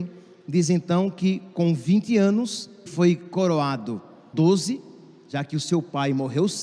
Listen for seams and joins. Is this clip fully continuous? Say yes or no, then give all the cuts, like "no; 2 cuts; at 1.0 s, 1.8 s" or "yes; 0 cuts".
no; 2 cuts; at 2.9 s, 4.3 s